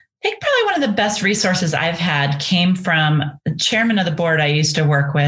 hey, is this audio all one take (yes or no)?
yes